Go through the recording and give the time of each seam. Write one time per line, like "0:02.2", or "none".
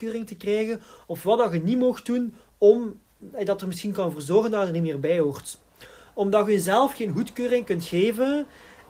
none